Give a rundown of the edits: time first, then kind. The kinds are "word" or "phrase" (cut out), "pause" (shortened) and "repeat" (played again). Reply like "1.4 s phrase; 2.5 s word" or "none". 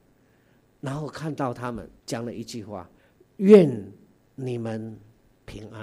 2.0 s pause; 3.0 s pause